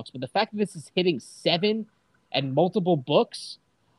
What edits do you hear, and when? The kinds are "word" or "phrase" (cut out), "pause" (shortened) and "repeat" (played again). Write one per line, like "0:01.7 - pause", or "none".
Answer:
none